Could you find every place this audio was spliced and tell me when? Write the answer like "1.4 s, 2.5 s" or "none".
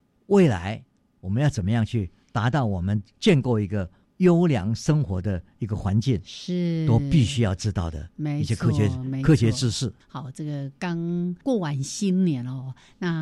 10.0 s